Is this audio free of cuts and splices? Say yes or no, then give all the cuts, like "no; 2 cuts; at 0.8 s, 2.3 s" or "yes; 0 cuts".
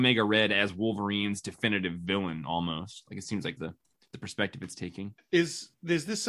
no; 1 cut; at 3.6 s